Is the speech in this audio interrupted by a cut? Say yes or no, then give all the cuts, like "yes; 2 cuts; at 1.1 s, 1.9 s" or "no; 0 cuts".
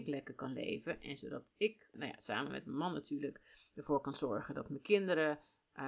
no; 0 cuts